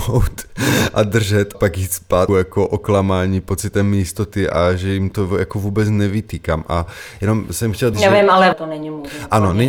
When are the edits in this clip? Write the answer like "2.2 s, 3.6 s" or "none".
1.5 s, 2.3 s, 7.9 s, 8.5 s